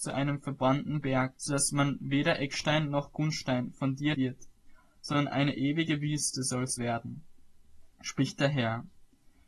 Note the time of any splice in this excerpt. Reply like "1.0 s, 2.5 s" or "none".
1.4 s, 4.1 s, 6.8 s, 7.9 s